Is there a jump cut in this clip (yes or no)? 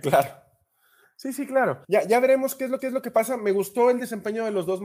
yes